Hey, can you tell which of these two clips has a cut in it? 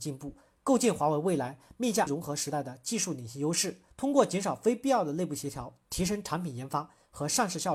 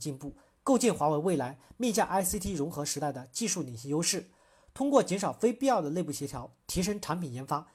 first; 2 cuts; at 2.1 s, 3.9 s

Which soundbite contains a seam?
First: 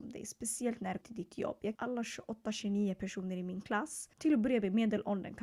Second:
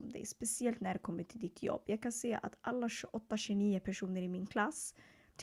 first; 3 cuts; at 1.0 s, 1.7 s, 4.1 s

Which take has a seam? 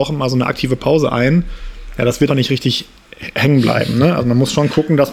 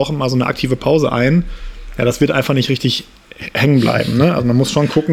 first; 1 cut; at 2.3 s

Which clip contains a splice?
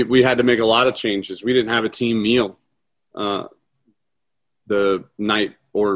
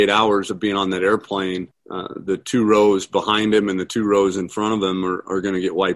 second; 1 cut; at 1.7 s

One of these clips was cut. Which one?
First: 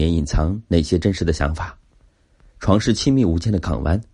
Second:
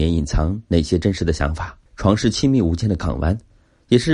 second; 1 cut; at 1.9 s

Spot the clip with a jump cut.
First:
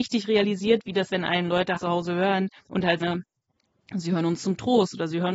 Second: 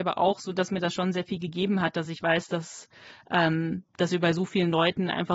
first; 4 cuts; at 1.1 s, 1.8 s, 2.6 s, 3.0 s

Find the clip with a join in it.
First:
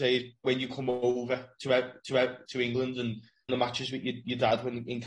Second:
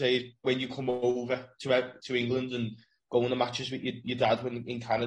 first; 2 cuts; at 2.0 s, 3.5 s

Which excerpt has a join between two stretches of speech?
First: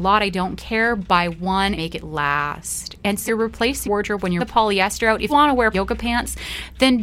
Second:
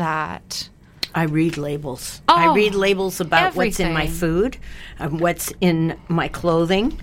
first; 6 cuts; at 1.8 s, 3.3 s, 3.9 s, 4.4 s, 5.3 s, 5.7 s

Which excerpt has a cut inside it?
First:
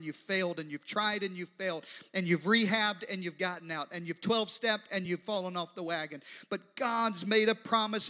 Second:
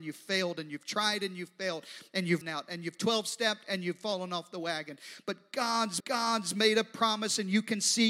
second; 2 cuts; at 2.4 s, 6.0 s

